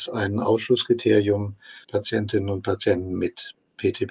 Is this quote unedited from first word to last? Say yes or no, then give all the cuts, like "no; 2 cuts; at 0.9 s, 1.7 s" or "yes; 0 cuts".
no; 1 cut; at 1.8 s